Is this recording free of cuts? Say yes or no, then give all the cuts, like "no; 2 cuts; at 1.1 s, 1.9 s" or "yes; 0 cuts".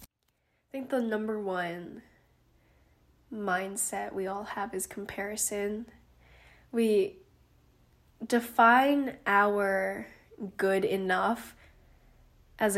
yes; 0 cuts